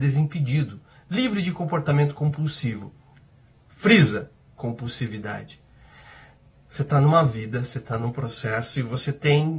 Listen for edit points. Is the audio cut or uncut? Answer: uncut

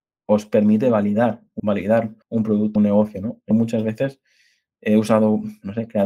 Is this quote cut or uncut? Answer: cut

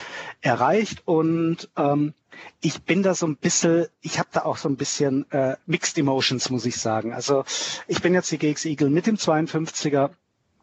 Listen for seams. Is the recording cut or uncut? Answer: uncut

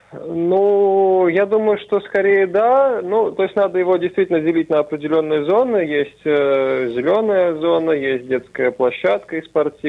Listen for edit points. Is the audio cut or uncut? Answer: uncut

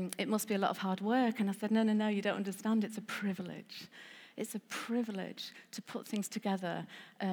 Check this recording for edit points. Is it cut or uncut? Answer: uncut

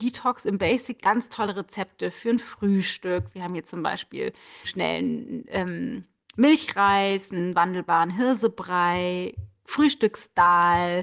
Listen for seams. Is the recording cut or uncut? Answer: cut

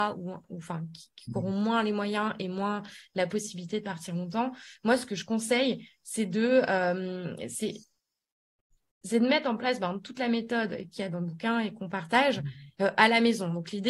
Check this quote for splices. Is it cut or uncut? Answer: uncut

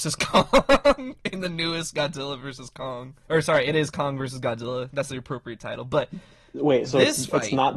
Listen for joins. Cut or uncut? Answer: cut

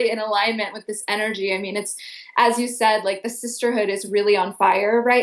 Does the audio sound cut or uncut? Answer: uncut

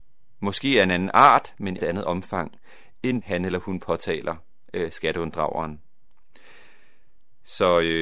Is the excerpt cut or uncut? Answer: cut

